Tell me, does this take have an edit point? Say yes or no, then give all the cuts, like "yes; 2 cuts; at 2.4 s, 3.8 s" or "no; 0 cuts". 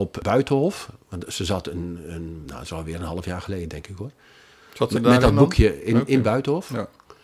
no; 0 cuts